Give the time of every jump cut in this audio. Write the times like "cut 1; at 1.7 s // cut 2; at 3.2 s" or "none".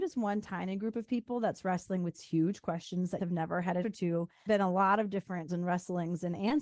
cut 1; at 2.1 s // cut 2; at 3.2 s // cut 3; at 3.8 s // cut 4; at 4.5 s // cut 5; at 5.5 s